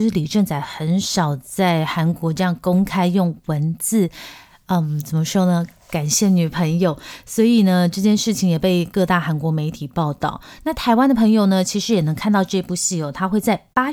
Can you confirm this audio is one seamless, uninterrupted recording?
yes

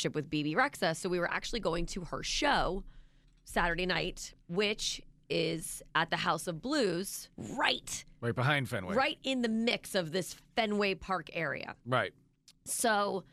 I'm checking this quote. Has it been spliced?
yes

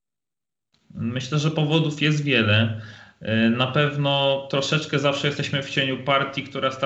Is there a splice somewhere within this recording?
no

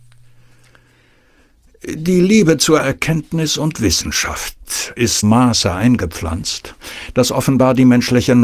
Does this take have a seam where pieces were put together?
yes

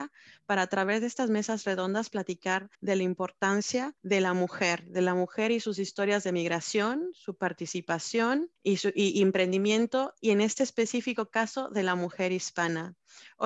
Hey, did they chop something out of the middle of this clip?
yes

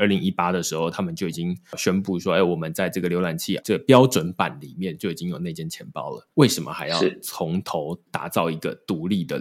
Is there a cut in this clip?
yes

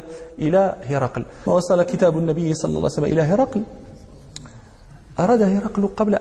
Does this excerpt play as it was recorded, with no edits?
no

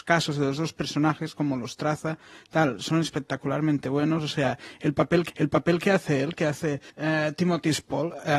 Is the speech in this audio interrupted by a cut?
yes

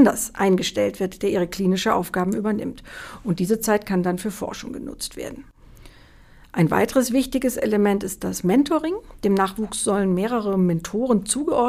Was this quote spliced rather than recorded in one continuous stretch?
no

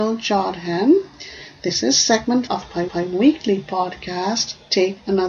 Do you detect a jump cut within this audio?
yes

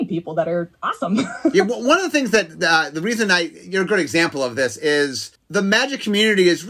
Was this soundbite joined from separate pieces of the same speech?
yes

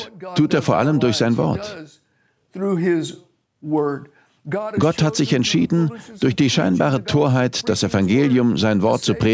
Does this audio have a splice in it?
no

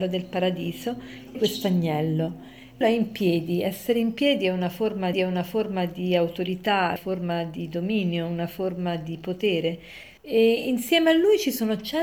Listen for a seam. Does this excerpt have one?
yes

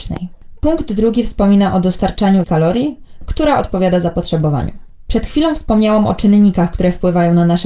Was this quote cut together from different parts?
yes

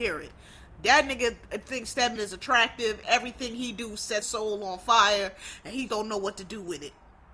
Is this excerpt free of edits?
no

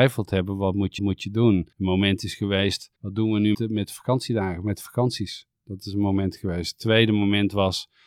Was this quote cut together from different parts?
yes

